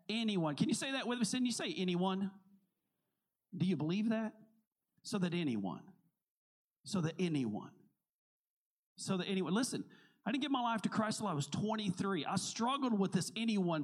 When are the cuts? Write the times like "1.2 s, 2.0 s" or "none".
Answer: none